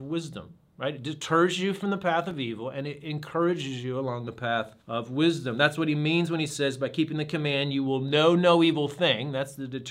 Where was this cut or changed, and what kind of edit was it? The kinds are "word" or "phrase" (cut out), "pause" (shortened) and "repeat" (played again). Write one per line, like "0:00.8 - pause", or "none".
0:04.8 - pause